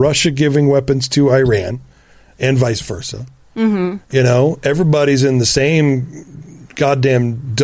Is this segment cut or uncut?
uncut